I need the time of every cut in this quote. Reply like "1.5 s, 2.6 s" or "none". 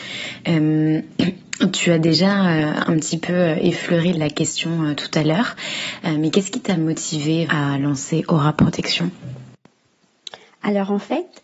4.1 s, 7.5 s